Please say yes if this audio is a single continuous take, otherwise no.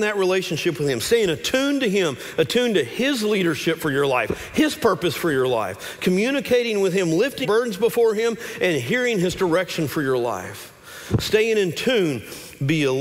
no